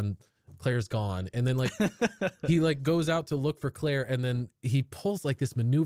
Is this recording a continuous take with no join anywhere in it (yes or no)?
no